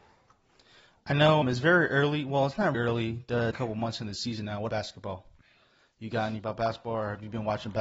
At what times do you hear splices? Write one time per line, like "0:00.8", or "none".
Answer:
0:01.4
0:02.7
0:03.5
0:04.7
0:06.4